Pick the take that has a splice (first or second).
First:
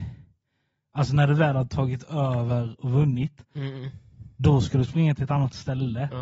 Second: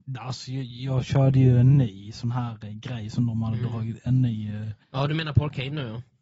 second